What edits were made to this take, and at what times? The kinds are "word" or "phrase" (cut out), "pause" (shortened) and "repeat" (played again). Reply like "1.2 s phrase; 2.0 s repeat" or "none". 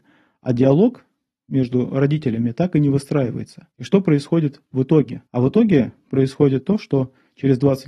3.7 s pause; 5.3 s pause